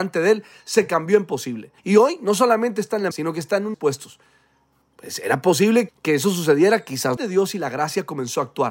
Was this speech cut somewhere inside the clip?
yes; 5 cuts; at 1.8 s, 3.1 s, 3.7 s, 5.9 s, 7.2 s

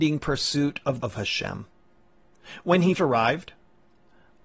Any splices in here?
yes; 2 cuts; at 1.0 s, 2.9 s

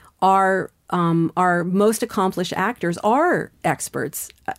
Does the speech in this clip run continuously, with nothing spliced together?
yes; 0 cuts

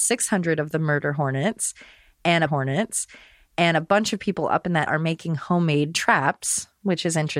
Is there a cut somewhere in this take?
yes; 2 cuts; at 2.5 s, 4.9 s

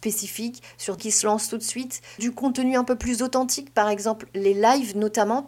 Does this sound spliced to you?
yes; 2 cuts; at 1.0 s, 2.2 s

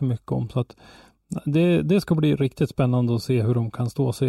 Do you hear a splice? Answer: no; 0 cuts

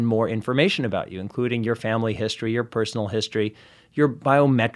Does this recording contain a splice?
no; 0 cuts

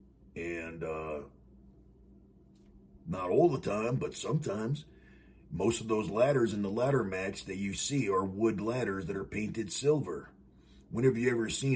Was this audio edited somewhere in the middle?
no; 0 cuts

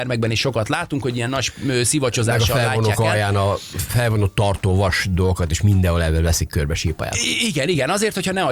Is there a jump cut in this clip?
no; 0 cuts

